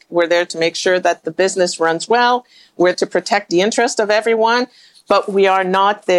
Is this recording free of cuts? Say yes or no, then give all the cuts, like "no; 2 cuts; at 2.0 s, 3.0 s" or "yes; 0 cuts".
no; 1 cut; at 2.9 s